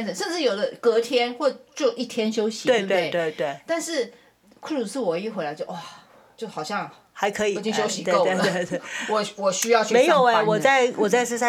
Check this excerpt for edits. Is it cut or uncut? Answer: uncut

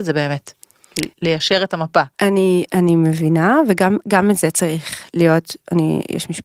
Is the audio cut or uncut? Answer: cut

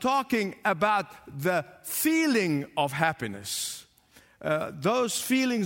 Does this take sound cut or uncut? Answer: uncut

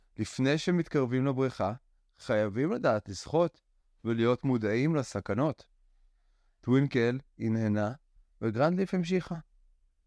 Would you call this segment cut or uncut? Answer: uncut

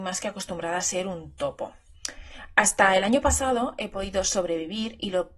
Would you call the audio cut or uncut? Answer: uncut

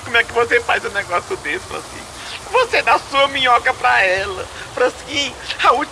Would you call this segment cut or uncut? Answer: cut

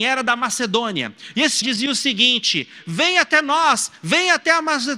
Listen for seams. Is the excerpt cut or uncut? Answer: cut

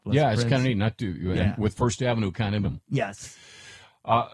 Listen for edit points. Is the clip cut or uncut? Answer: cut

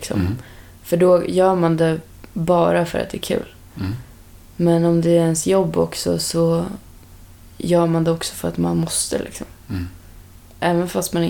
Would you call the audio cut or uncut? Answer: uncut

